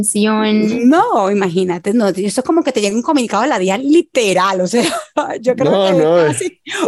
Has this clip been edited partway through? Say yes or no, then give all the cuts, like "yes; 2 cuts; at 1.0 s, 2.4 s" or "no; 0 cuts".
no; 0 cuts